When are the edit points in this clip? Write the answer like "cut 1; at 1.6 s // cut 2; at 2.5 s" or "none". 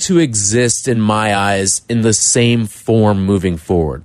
none